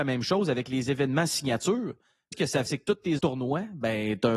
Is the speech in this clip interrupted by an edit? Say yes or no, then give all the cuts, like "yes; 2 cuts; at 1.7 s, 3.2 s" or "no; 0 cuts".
yes; 3 cuts; at 2.3 s, 2.7 s, 3.2 s